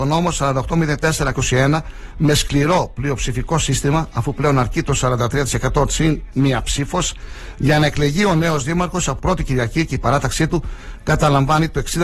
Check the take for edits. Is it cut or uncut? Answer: cut